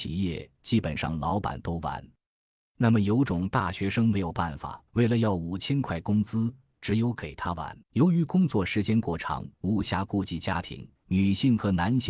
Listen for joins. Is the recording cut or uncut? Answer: cut